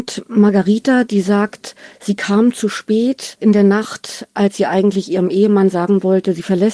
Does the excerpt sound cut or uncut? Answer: uncut